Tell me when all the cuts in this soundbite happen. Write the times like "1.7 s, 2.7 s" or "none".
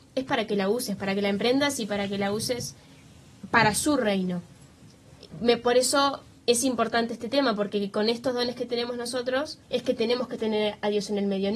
5.3 s, 6.4 s, 9.6 s

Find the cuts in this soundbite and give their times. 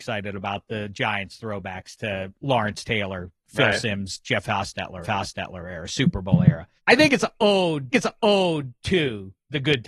5.0 s, 6.8 s, 7.9 s

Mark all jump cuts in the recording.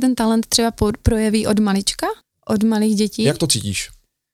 2.2 s

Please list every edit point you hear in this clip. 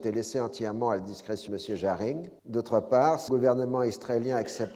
1.5 s, 2.4 s, 3.3 s

